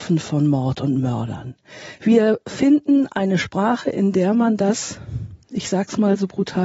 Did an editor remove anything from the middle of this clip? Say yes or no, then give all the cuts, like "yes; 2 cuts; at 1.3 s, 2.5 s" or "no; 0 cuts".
no; 0 cuts